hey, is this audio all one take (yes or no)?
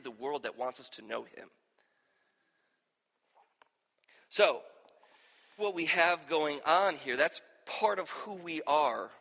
no